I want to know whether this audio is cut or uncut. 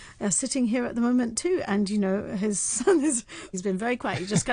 cut